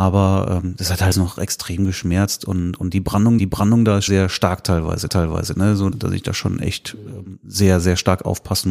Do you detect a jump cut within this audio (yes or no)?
yes